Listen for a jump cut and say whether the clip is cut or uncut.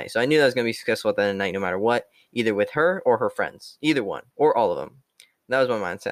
cut